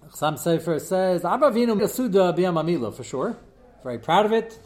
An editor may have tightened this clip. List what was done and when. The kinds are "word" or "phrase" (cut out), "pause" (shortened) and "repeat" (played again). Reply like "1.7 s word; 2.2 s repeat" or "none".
1.8 s word